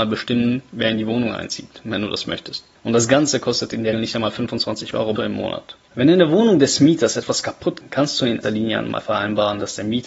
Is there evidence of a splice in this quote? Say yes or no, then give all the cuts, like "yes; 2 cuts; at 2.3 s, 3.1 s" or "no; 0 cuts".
yes; 5 cuts; at 3.9 s, 5.2 s, 5.8 s, 7.8 s, 8.4 s